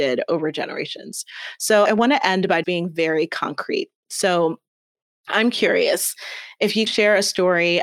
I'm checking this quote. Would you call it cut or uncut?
cut